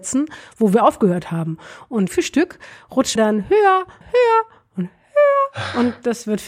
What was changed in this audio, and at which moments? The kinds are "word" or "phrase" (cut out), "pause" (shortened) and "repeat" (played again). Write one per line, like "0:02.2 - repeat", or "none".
0:02.1 - word
0:03.2 - word
0:04.0 - word